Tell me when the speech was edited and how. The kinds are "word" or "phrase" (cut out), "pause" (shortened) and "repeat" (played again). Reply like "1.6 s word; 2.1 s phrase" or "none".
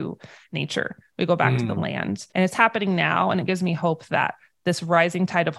2.3 s pause